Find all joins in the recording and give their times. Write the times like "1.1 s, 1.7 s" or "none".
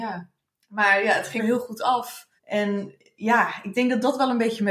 1.4 s, 2.4 s